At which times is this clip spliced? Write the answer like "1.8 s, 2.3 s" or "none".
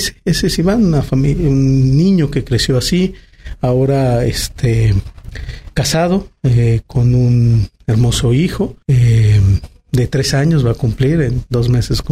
8.8 s